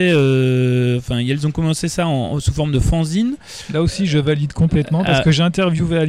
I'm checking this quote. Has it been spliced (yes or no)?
no